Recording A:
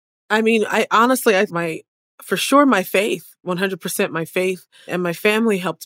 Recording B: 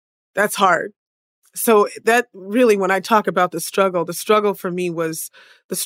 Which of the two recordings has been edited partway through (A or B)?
A